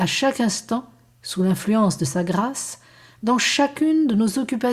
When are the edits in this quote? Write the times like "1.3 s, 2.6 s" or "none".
none